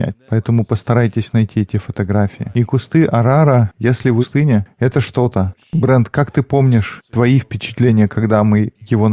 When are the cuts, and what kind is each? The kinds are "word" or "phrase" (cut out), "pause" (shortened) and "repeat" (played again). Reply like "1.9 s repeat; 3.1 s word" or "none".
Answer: 4.2 s phrase

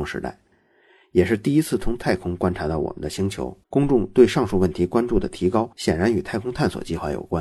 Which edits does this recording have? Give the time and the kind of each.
3.6 s pause; 5.7 s pause

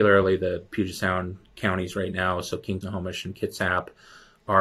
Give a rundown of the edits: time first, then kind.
2.8 s word

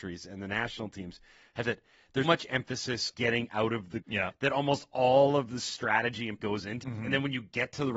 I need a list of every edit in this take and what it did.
1.6 s word; 2.2 s word; 3.1 s word; 4.0 s word; 6.4 s word; 6.8 s word

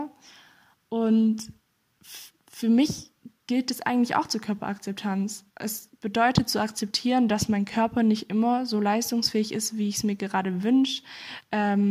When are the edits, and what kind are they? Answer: 3.4 s pause; 5.5 s pause

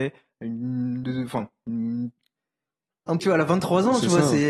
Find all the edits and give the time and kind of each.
1.0 s word; 3.2 s word

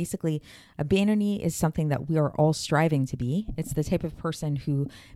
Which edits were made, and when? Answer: none

